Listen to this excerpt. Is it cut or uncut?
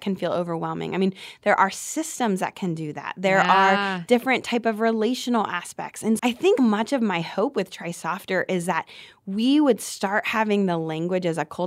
cut